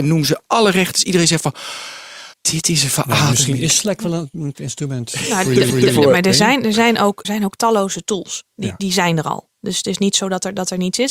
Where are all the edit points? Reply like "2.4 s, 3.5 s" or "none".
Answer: 2.3 s, 4.5 s, 5.7 s, 7.2 s, 8.5 s